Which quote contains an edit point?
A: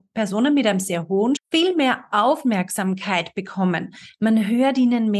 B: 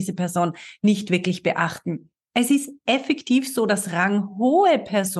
A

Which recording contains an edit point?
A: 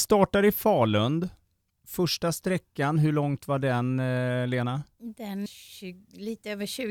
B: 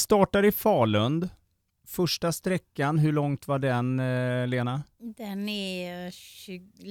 A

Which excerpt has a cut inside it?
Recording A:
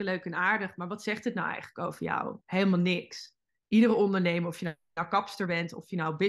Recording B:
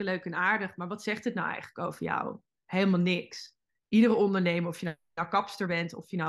A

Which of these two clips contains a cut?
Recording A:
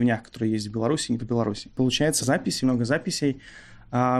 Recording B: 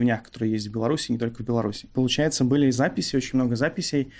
A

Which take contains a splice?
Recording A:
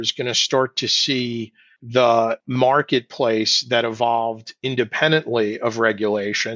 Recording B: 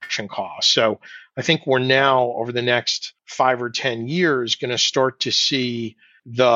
B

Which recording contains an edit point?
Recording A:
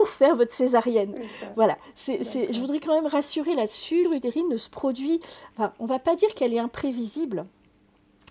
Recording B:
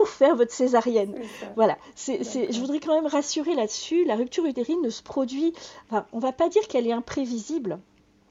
A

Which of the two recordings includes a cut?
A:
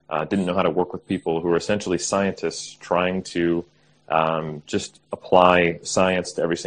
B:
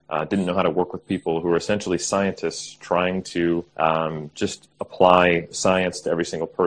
B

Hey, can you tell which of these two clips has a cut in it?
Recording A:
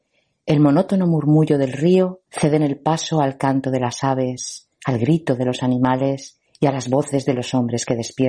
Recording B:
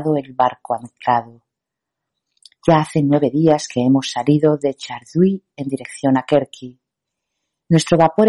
A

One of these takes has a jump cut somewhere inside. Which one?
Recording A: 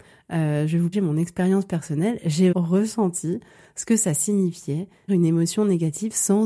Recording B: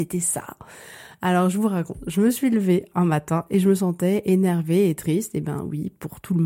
A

